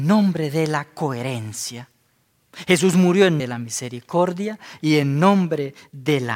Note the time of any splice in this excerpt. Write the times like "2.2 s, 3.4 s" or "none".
3.4 s